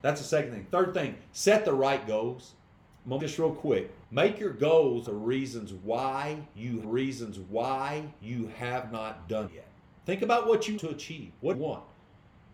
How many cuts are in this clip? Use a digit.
8